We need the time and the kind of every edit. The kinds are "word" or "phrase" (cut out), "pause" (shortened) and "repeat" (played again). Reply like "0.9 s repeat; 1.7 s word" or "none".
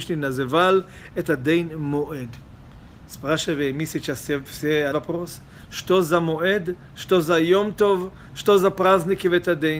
4.9 s word

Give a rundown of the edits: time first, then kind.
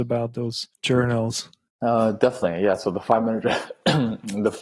none

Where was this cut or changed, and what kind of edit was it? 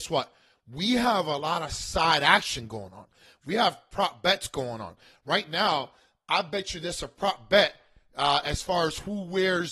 none

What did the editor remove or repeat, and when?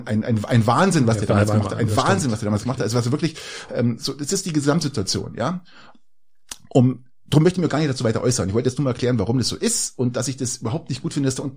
none

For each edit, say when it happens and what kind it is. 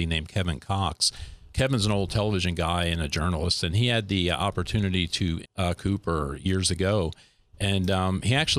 1.5 s word; 5.4 s word; 5.8 s word

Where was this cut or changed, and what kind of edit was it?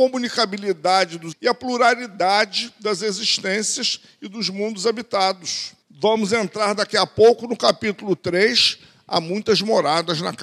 1.3 s word; 5.8 s pause

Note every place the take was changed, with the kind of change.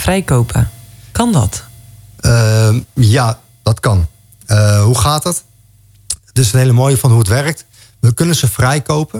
none

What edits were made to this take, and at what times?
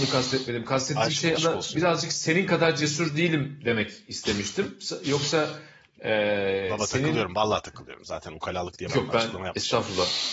1.4 s word; 8.9 s word

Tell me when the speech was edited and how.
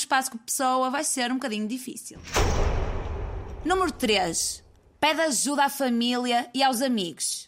none

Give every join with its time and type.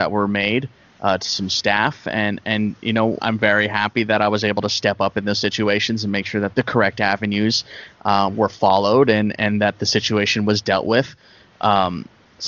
3.2 s word; 6.5 s word

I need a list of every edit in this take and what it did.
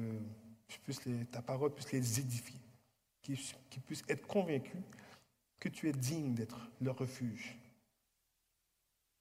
none

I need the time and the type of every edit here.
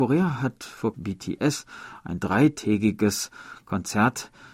0.9 s phrase

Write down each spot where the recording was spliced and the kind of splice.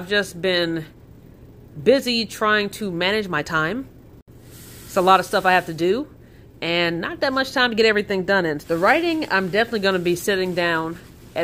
8.6 s word

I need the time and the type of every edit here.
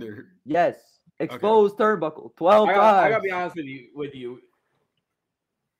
1.1 s pause

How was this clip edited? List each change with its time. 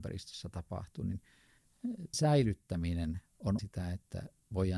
2.1 s word; 3.6 s word

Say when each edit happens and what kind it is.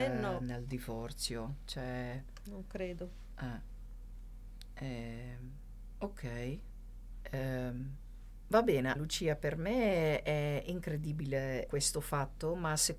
9.0 s word; 11.7 s word

